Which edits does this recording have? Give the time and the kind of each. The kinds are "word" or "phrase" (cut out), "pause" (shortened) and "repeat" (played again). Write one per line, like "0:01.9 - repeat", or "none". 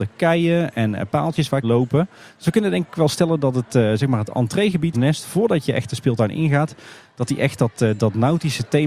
0:01.6 - phrase
0:04.9 - phrase